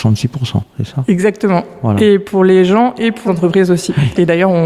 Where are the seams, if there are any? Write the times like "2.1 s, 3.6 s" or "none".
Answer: 3.3 s